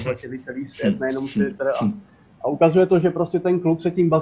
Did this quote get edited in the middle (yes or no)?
no